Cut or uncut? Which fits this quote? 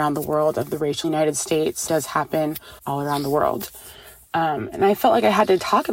cut